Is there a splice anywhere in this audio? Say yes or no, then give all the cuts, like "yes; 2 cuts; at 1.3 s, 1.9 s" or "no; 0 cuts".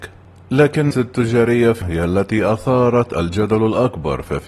yes; 2 cuts; at 0.9 s, 1.8 s